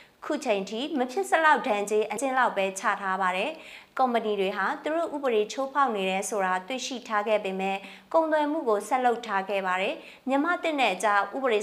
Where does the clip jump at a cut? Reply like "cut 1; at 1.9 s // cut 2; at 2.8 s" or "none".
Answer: cut 1; at 2.2 s